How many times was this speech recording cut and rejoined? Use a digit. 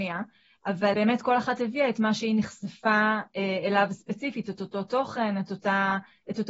1